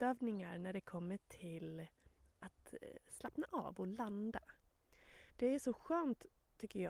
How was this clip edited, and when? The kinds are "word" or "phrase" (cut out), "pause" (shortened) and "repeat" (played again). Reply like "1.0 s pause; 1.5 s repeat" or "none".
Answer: 2.2 s pause; 5.3 s pause

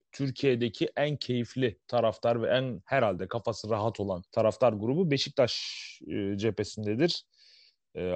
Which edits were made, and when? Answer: 1.8 s pause; 4.3 s pause

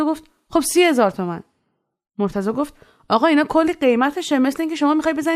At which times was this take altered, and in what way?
none

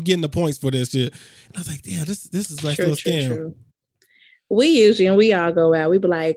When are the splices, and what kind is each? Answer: none

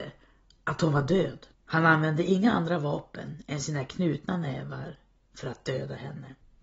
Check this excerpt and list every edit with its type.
1.5 s pause

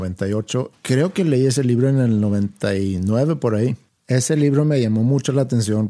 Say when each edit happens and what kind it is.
none

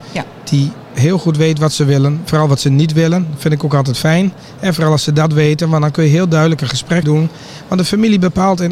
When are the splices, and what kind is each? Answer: 7.0 s word

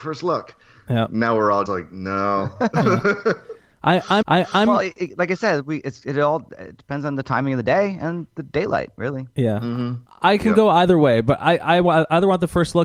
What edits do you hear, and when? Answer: 1.7 s word; 4.2 s repeat; 10.1 s pause

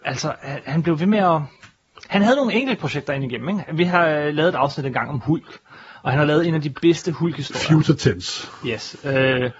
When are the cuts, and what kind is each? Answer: none

